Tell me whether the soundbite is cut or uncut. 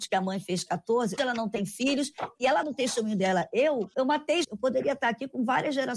cut